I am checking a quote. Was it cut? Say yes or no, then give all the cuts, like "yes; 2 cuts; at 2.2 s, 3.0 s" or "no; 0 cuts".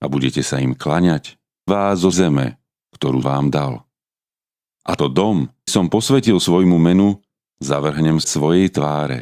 yes; 6 cuts; at 1.7 s, 2.1 s, 3.2 s, 5.0 s, 5.7 s, 8.2 s